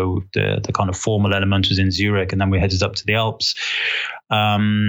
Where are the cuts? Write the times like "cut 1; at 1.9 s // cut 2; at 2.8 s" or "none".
none